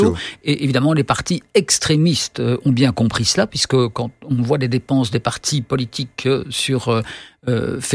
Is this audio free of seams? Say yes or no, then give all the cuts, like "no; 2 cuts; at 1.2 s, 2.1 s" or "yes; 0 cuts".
yes; 0 cuts